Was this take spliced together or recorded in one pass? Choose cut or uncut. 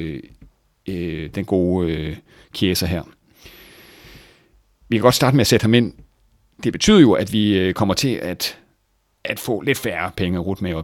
uncut